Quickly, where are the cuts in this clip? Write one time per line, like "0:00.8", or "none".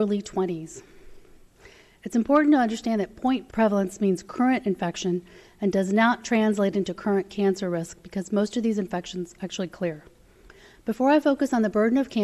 none